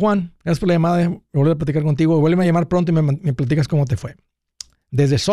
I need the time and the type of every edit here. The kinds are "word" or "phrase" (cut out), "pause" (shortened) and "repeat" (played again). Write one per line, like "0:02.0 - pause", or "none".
none